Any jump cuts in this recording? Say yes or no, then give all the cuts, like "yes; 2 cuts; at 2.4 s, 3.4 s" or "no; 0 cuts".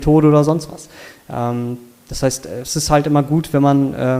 no; 0 cuts